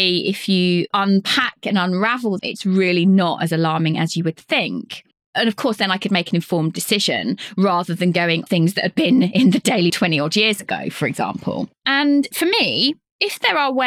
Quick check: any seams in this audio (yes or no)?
yes